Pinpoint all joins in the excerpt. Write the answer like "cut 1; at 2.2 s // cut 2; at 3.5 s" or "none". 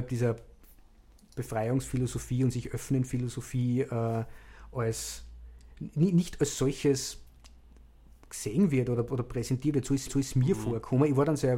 cut 1; at 10.1 s